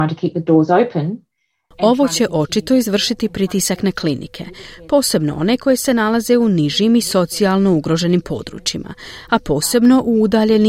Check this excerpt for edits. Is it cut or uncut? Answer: uncut